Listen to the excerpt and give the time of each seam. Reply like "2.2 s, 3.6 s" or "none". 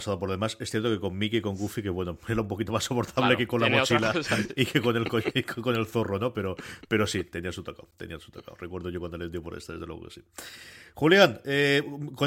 none